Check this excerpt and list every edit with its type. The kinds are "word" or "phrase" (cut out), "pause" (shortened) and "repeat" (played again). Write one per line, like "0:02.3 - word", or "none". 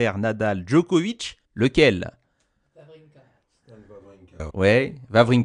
0:01.4 - pause
0:04.5 - word